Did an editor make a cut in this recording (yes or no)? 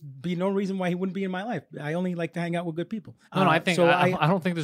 yes